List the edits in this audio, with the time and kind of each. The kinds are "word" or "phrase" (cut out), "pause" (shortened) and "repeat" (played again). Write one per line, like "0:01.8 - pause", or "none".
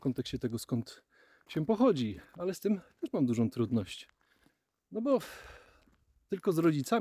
none